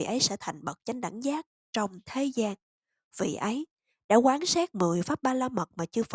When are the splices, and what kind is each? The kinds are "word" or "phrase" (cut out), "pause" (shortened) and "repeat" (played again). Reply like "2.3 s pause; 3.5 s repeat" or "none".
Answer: none